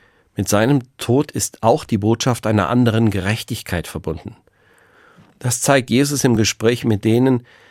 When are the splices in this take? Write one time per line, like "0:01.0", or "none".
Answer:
none